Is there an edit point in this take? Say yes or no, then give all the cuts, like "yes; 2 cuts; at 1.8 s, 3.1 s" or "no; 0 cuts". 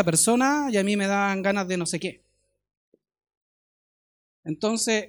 no; 0 cuts